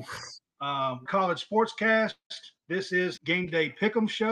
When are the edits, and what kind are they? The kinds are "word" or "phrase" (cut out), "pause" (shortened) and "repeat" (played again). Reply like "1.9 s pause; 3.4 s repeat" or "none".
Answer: 1.1 s phrase; 2.6 s pause; 3.2 s word